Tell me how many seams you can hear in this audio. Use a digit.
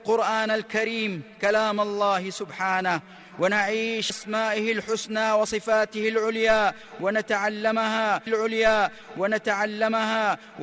2